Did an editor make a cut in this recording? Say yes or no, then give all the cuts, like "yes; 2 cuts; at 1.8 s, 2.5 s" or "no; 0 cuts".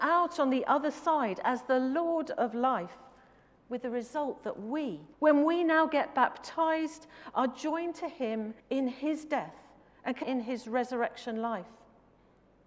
yes; 3 cuts; at 5.1 s, 8.6 s, 10.2 s